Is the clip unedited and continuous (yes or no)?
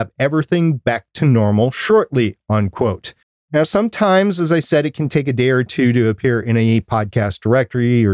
no